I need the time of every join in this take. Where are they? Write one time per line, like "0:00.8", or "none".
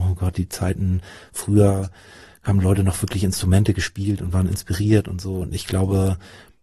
none